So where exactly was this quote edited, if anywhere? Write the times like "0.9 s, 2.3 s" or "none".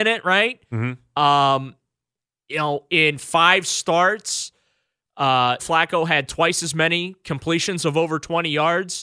5.6 s